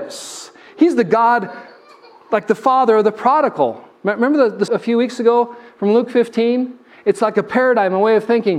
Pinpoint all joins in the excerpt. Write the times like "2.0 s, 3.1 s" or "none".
4.7 s